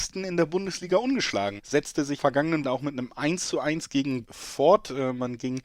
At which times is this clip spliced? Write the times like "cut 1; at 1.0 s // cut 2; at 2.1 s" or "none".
cut 1; at 1.6 s // cut 2; at 2.2 s // cut 3; at 2.6 s // cut 4; at 4.2 s